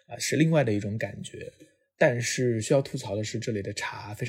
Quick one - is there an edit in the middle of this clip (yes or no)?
no